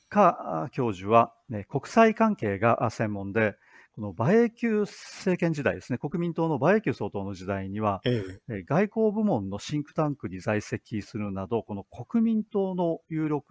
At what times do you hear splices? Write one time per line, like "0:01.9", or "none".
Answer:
none